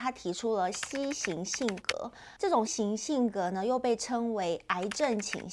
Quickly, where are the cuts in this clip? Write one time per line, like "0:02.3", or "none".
0:02.4
0:02.7